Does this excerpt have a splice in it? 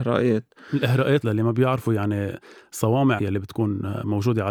yes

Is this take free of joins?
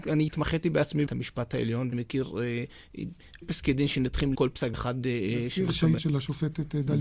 no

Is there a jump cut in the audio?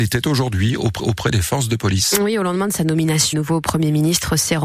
yes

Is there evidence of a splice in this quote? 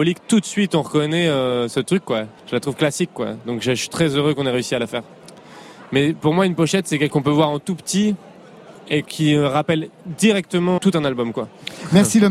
yes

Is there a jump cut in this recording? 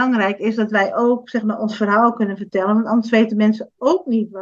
no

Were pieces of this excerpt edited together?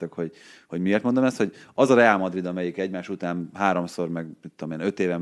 no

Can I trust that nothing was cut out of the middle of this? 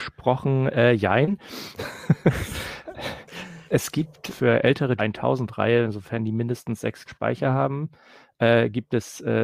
no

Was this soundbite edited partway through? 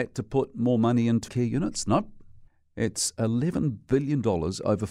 yes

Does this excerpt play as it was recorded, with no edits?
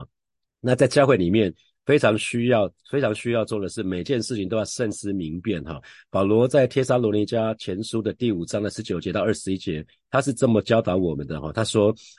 yes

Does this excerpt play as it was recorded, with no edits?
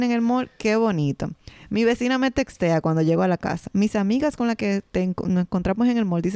yes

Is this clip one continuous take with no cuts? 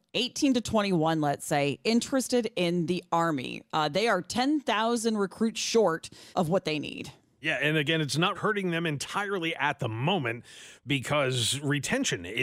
no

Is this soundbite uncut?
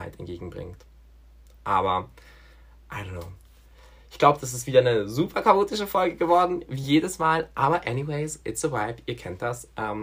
yes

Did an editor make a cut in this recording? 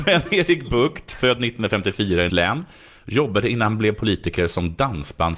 yes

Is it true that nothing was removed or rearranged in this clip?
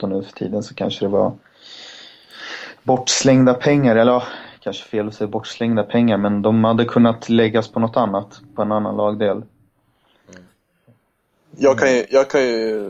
yes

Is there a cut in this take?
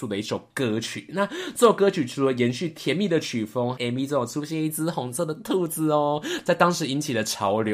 yes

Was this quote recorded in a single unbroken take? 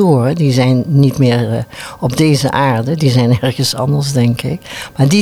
yes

